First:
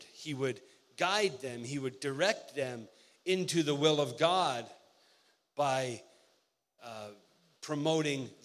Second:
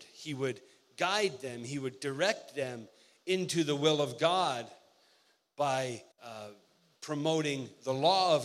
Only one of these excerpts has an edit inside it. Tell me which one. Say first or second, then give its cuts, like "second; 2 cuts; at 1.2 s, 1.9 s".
second; 1 cut; at 6.1 s